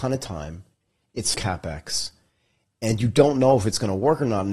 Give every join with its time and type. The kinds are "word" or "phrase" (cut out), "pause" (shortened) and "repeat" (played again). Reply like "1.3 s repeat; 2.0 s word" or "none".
1.3 s word